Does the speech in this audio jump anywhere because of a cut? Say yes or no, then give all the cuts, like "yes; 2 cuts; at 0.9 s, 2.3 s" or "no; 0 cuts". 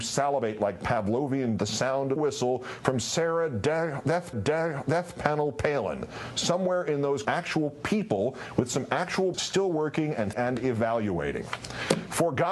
yes; 6 cuts; at 1.6 s, 2.2 s, 4.3 s, 7.2 s, 9.3 s, 10.3 s